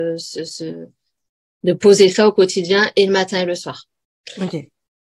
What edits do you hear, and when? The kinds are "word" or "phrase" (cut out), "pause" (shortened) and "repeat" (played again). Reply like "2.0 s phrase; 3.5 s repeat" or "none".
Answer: none